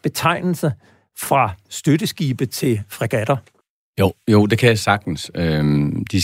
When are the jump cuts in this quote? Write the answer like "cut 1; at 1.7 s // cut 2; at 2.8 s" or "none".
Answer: cut 1; at 3.6 s